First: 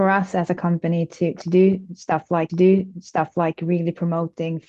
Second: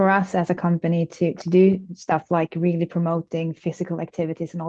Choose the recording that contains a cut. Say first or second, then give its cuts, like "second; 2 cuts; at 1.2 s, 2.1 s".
first; 1 cut; at 2.5 s